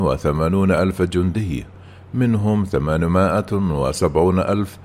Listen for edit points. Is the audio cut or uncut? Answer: uncut